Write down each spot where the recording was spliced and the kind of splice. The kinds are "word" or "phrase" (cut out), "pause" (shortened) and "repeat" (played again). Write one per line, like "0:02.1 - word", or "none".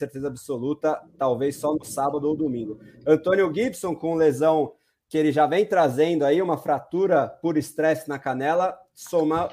none